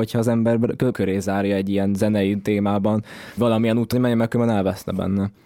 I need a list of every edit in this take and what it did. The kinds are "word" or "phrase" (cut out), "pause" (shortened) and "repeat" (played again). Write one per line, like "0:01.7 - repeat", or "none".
0:00.9 - word
0:03.4 - word
0:03.9 - word